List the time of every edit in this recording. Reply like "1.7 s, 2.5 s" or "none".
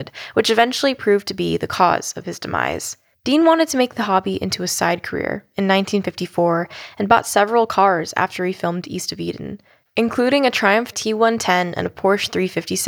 3.1 s, 10.9 s

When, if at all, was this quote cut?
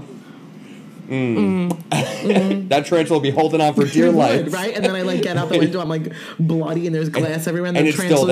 none

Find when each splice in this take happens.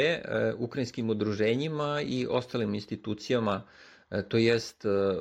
none

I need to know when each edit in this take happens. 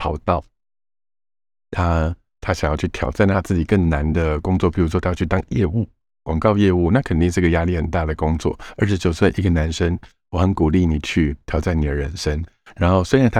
none

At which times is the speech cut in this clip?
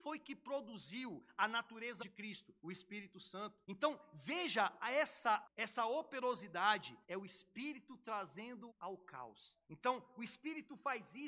2.0 s, 2.6 s, 3.6 s, 5.4 s, 7.0 s, 8.7 s, 9.6 s

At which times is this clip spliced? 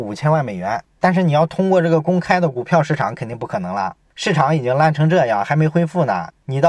none

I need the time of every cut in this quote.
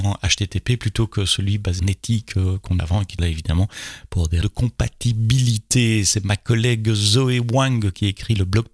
1.8 s, 2.8 s, 3.2 s, 4.4 s

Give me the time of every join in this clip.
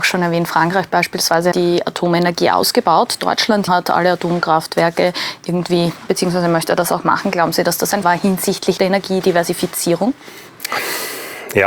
1.5 s, 3.7 s, 6.1 s, 8.0 s, 8.8 s

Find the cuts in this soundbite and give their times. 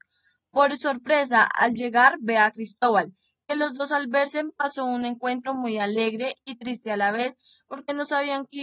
none

